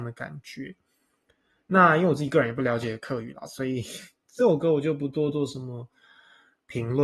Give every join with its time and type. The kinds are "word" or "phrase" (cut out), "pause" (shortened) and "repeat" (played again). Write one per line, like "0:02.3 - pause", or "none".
none